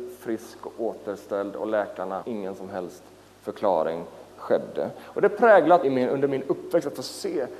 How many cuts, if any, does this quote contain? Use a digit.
3